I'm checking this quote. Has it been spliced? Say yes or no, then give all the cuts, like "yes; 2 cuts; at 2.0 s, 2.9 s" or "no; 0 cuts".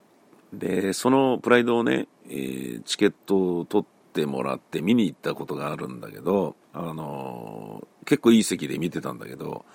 yes; 1 cut; at 6.6 s